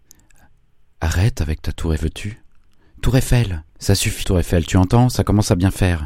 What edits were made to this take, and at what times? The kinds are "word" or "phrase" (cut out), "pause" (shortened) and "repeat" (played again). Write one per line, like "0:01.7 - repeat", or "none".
0:02.0 - word
0:03.7 - pause
0:04.2 - word